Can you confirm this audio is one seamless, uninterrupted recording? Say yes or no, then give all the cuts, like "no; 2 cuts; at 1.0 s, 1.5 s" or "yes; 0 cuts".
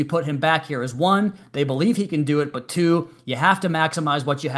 yes; 0 cuts